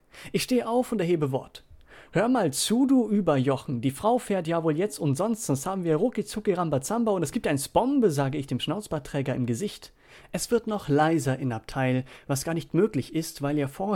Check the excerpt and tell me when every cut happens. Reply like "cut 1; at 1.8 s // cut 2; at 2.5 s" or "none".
none

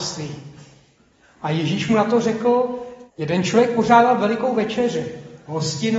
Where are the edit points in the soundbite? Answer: cut 1; at 3.1 s

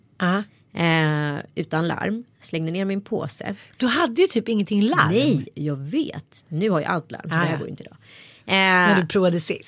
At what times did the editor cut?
none

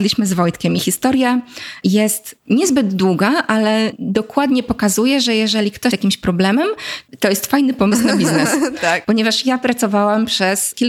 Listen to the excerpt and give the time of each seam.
cut 1; at 5.9 s

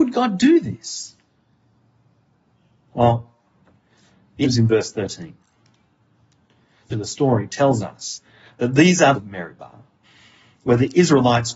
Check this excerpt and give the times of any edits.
cut 1; at 4.4 s // cut 2; at 6.9 s // cut 3; at 9.1 s

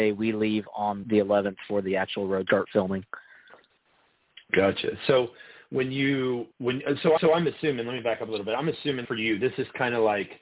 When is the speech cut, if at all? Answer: cut 1; at 1.0 s // cut 2; at 2.5 s // cut 3; at 4.4 s // cut 4; at 6.5 s // cut 5; at 7.2 s // cut 6; at 9.1 s

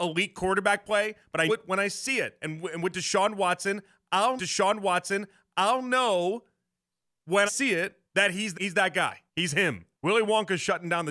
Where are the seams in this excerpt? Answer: cut 1; at 1.5 s // cut 2; at 4.4 s // cut 3; at 7.5 s // cut 4; at 8.1 s // cut 5; at 8.5 s // cut 6; at 9.3 s // cut 7; at 9.9 s

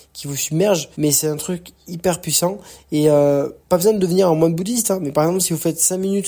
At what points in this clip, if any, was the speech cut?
cut 1; at 0.9 s // cut 2; at 3.6 s

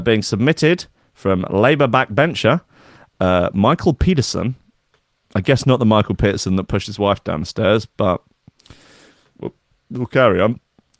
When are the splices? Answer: none

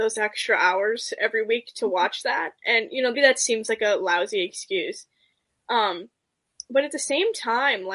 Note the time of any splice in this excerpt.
cut 1; at 3.1 s

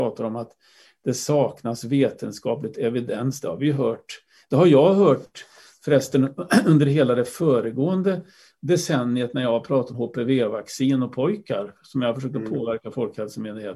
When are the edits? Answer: cut 1; at 9.9 s

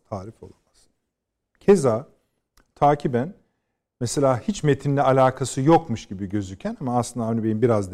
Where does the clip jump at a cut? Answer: none

